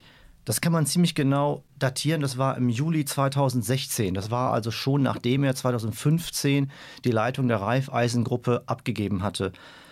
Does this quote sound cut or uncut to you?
uncut